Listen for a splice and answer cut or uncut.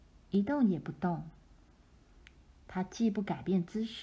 uncut